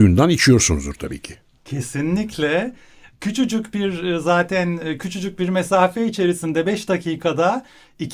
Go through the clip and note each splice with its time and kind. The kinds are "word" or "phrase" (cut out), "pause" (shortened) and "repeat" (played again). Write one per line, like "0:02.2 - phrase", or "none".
none